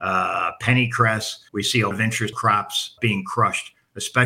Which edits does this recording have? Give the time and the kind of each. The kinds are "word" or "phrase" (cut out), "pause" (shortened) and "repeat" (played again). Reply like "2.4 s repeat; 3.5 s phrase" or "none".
1.5 s pause; 1.9 s word; 2.3 s phrase; 3.0 s word

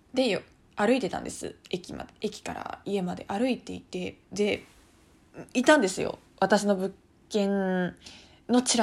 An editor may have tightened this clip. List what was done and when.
4.2 s pause; 6.3 s pause

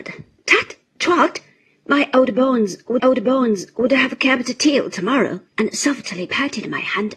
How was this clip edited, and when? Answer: 3.0 s repeat; 5.5 s pause

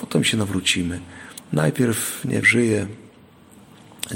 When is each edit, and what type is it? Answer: 2.4 s word

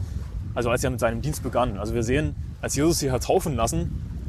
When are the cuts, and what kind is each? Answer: none

